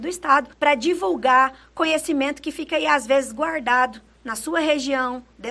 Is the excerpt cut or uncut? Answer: uncut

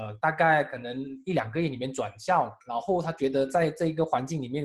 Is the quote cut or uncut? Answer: cut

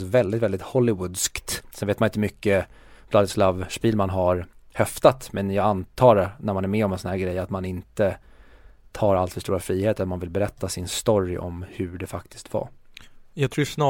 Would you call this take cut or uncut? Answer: uncut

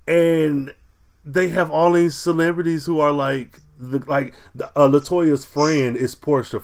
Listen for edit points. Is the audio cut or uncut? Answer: uncut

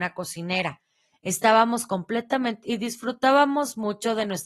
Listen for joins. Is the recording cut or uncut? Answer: cut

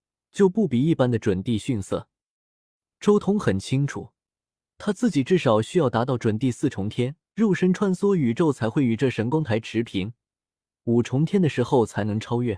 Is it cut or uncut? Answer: cut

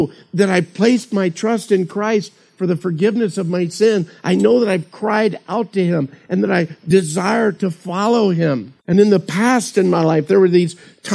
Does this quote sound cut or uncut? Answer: cut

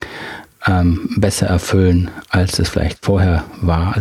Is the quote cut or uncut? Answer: uncut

